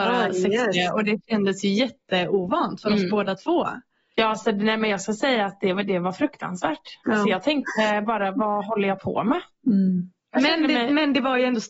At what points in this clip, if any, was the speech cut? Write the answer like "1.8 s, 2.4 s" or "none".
none